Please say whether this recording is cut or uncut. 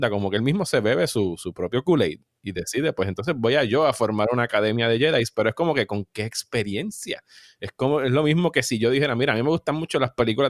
uncut